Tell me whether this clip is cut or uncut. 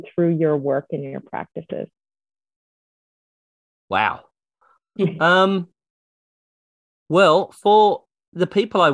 uncut